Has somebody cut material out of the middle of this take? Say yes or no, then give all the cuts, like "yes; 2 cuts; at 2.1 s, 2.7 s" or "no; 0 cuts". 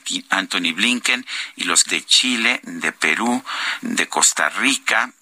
yes; 2 cuts; at 1.8 s, 3.8 s